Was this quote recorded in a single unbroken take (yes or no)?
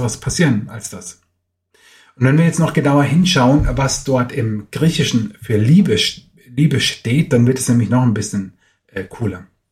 yes